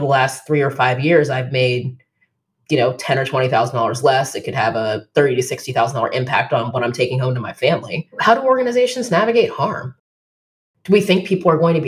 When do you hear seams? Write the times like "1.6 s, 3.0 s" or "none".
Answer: none